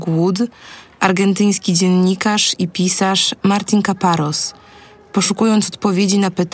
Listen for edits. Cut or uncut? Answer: uncut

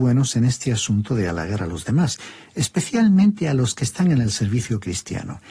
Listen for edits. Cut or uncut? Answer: uncut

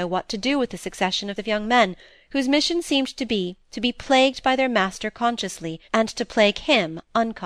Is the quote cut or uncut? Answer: cut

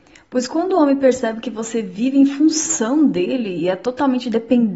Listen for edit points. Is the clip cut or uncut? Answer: uncut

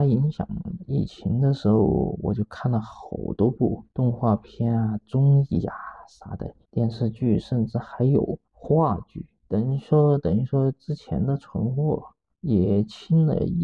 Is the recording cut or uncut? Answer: cut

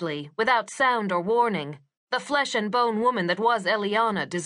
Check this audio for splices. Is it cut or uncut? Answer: uncut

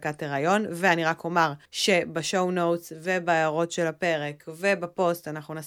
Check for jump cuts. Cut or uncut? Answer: cut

